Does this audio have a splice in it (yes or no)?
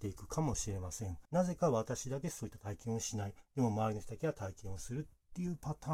yes